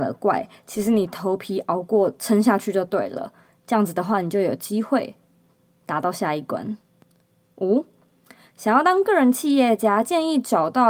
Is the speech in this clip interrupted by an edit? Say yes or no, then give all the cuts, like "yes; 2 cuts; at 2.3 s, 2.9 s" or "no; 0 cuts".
no; 0 cuts